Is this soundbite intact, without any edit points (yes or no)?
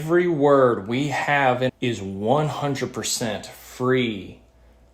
no